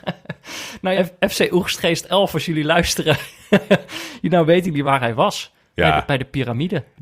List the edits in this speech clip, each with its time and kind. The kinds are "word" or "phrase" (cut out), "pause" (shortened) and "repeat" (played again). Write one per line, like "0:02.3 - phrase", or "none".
0:01.0 - word
0:04.8 - word